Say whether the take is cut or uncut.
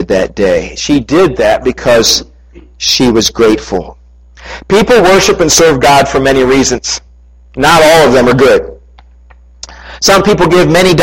uncut